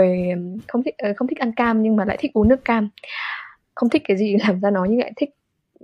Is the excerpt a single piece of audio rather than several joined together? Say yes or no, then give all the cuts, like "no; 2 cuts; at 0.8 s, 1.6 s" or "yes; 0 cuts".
yes; 0 cuts